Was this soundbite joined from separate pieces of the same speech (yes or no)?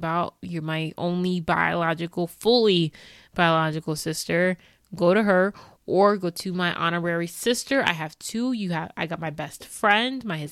no